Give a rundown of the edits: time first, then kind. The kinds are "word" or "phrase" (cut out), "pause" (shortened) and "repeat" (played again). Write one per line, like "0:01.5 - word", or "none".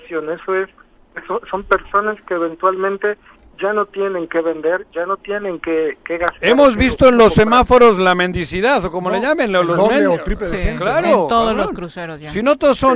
none